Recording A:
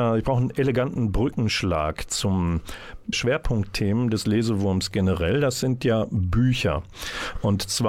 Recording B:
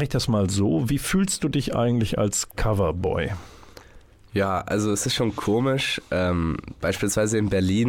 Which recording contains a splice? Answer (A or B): A